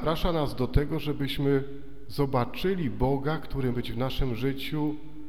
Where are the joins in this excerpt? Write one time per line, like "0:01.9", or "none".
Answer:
0:03.7